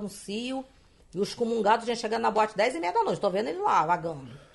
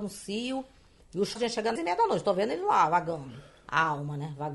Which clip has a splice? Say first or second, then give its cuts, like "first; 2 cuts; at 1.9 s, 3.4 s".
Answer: second; 2 cuts; at 1.4 s, 1.8 s